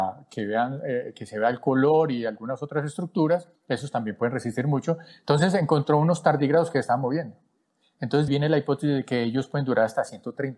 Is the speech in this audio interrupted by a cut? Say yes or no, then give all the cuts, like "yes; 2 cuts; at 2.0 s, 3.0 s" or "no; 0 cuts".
yes; 2 cuts; at 3.6 s, 8.3 s